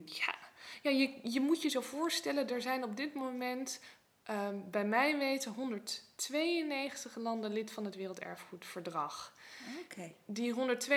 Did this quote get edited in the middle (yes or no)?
no